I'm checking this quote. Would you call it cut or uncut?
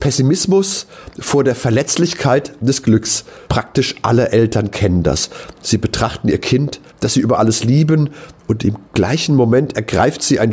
cut